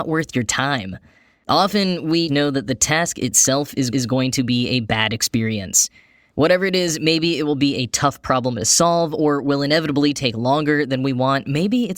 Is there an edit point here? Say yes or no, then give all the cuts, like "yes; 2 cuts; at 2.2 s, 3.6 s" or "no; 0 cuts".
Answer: yes; 2 cuts; at 2.3 s, 3.9 s